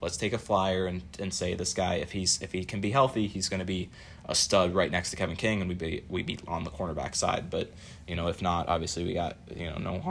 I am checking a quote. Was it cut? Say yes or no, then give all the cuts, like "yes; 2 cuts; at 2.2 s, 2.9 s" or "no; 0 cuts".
yes; 1 cut; at 6.5 s